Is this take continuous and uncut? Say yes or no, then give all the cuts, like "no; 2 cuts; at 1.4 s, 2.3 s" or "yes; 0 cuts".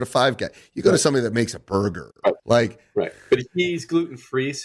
no; 1 cut; at 2.4 s